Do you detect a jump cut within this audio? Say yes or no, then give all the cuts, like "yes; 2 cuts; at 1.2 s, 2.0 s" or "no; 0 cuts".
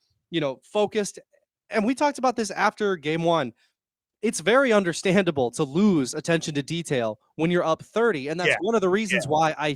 no; 0 cuts